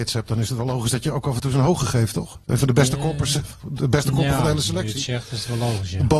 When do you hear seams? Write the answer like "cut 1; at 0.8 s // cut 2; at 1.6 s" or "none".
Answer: cut 1; at 2.4 s // cut 2; at 3.6 s